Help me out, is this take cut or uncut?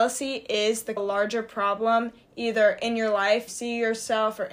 cut